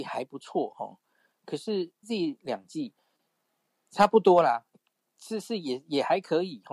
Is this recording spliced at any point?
yes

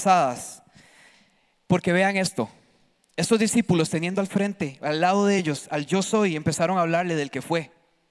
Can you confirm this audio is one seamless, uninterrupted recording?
yes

